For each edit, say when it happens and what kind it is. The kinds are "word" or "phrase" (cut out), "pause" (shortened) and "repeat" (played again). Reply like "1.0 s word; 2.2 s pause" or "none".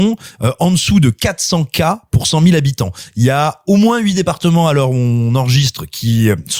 none